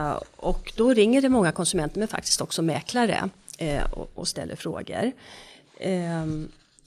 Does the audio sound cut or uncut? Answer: uncut